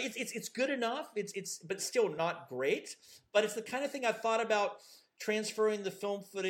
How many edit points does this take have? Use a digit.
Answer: 0